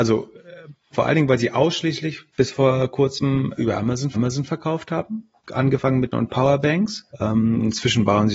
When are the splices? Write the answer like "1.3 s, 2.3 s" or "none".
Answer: 0.9 s, 2.3 s, 3.6 s, 4.1 s, 5.4 s, 6.1 s, 7.1 s